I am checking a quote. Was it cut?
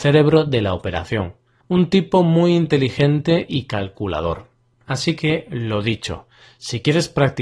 no; 0 cuts

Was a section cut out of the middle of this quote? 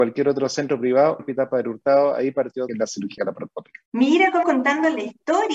yes; 5 cuts; at 1.2 s, 2.7 s, 3.2 s, 3.9 s, 4.4 s

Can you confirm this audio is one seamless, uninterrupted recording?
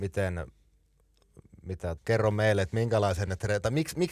no; 1 cut; at 2.0 s

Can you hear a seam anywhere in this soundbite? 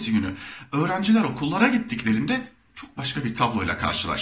no; 0 cuts

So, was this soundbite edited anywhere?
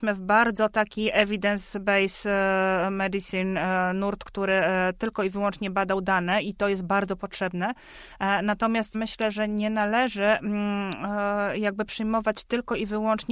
yes; 1 cut; at 8.9 s

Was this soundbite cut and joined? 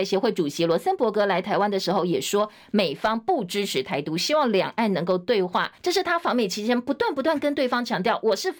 yes; 1 cut; at 5.8 s

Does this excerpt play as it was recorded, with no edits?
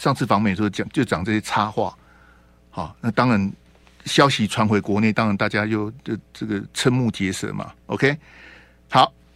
yes; 0 cuts

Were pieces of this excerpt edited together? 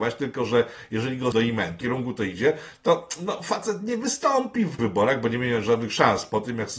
yes; 3 cuts; at 1.3 s, 1.8 s, 4.8 s

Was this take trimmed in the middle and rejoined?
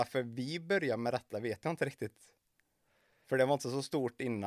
no; 0 cuts

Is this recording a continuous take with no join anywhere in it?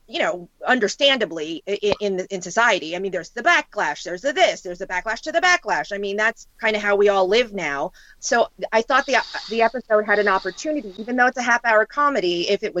no; 2 cuts; at 6.5 s, 8.2 s

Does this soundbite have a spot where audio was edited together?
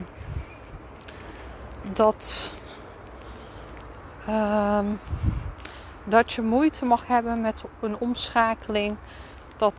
no; 0 cuts

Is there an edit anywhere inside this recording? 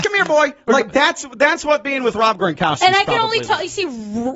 no; 0 cuts

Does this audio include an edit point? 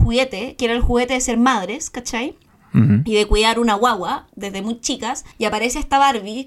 yes; 1 cut; at 5.3 s

